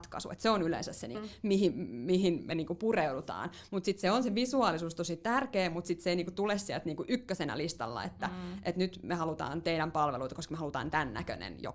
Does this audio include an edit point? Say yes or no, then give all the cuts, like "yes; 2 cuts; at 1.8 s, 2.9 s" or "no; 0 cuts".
yes; 1 cut; at 1.1 s